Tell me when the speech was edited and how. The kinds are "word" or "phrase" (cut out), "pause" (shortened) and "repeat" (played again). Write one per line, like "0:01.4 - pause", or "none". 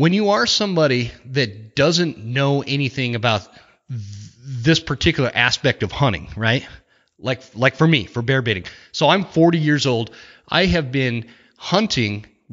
none